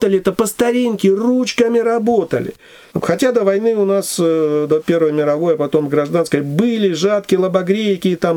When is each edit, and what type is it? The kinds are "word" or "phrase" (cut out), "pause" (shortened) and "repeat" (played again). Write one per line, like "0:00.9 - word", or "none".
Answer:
none